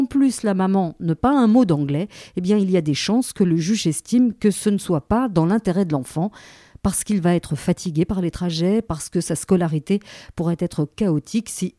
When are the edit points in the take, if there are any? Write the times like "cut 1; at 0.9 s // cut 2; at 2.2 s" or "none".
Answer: cut 1; at 1.2 s